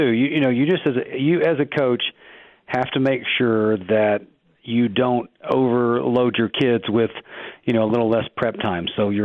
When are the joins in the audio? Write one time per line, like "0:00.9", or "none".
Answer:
none